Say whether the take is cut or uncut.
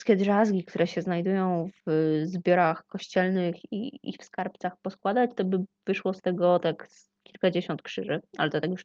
uncut